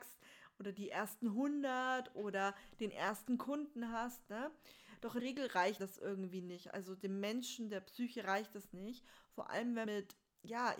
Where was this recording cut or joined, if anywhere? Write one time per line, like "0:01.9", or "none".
0:05.2
0:05.8
0:09.9